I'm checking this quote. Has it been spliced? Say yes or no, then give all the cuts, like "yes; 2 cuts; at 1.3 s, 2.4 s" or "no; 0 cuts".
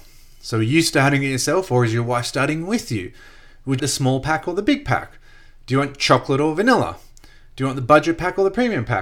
yes; 1 cut; at 3.8 s